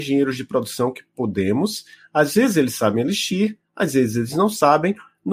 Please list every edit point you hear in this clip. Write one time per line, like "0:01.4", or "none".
none

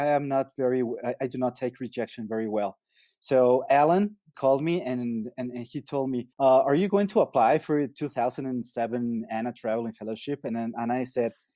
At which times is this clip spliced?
0:04.3
0:06.3

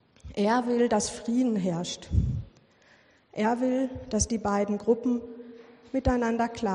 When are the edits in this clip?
none

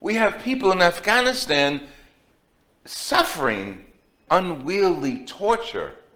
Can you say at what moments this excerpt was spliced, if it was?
0:04.3

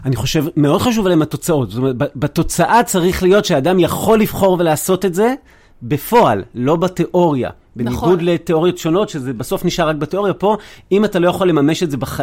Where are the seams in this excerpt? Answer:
none

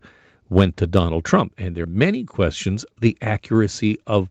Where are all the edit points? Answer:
0:01.8
0:02.9

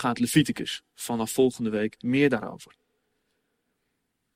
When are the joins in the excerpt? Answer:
none

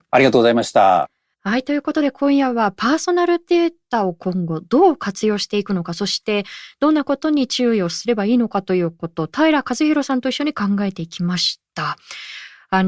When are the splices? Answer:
0:01.3

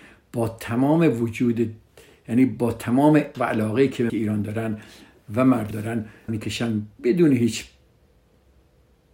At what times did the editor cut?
0:03.3
0:04.1
0:05.7
0:06.3

